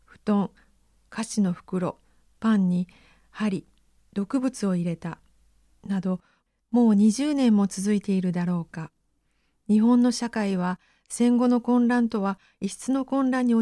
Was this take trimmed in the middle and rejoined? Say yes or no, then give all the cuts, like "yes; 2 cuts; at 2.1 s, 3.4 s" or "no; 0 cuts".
no; 0 cuts